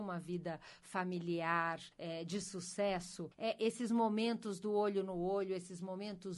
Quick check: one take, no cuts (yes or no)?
no